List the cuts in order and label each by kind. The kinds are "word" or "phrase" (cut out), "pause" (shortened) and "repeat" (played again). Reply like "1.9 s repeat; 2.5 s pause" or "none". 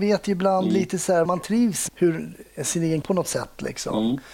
1.3 s phrase; 1.9 s word; 3.0 s word